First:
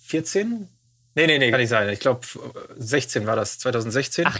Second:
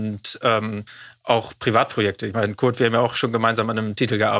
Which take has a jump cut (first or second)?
first